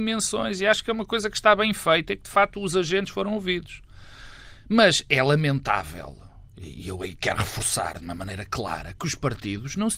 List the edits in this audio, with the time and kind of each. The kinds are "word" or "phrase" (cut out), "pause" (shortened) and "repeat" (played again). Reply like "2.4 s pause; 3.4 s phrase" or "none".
none